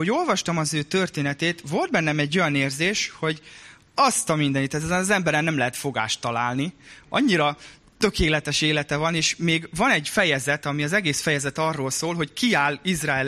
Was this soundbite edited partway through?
no; 0 cuts

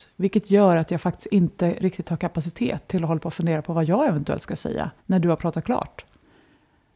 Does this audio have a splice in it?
yes; 1 cut; at 5.0 s

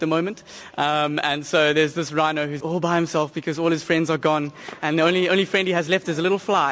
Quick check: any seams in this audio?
yes; 1 cut; at 2.6 s

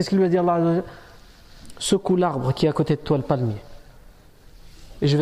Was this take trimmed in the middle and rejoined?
no; 0 cuts

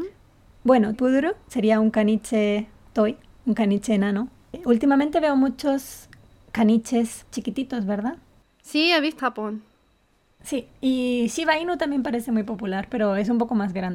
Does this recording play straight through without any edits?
no; 3 cuts; at 0.9 s, 7.2 s, 9.2 s

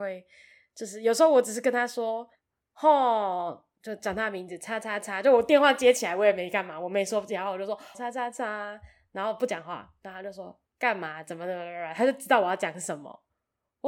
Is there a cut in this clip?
yes; 2 cuts; at 2.3 s, 7.9 s

